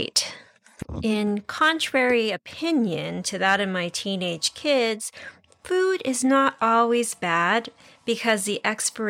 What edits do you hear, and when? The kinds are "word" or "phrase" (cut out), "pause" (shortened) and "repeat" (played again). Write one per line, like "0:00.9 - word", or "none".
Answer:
none